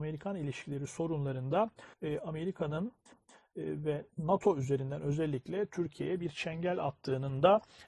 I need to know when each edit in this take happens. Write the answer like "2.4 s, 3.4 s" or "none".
1.9 s, 3.1 s